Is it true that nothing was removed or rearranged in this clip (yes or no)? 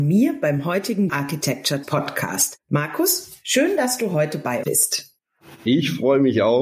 no